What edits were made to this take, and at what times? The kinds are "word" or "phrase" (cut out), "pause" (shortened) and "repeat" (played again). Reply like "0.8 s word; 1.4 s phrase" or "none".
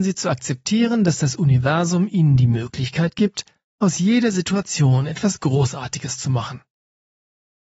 none